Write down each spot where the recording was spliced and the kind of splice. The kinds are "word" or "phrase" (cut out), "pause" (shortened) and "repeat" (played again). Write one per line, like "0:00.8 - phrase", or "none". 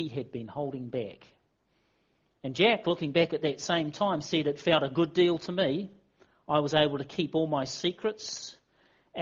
none